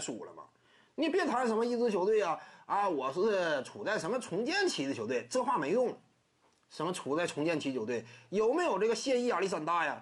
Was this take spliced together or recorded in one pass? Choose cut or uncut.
uncut